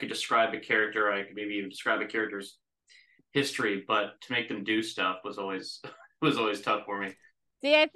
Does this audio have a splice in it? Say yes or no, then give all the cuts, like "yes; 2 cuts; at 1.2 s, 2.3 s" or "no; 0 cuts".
no; 0 cuts